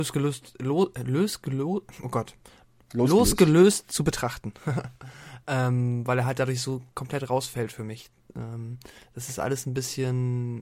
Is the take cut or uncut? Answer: uncut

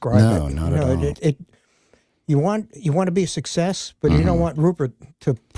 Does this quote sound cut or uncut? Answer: cut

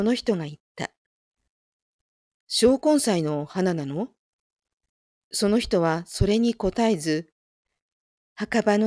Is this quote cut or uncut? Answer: uncut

